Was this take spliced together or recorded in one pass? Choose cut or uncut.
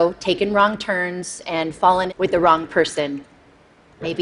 cut